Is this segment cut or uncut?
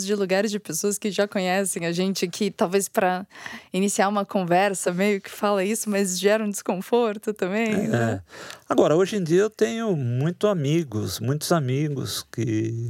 uncut